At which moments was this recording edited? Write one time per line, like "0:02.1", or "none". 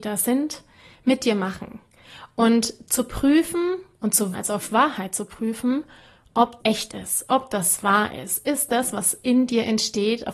0:04.3
0:06.6